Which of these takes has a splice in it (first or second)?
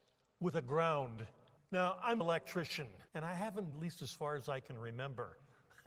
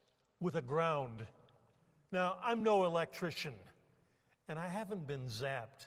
first